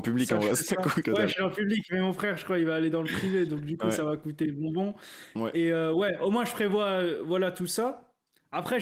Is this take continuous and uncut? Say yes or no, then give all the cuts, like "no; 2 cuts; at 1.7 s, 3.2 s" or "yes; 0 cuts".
no; 1 cut; at 1.0 s